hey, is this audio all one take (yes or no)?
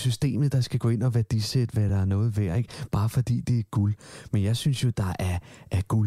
yes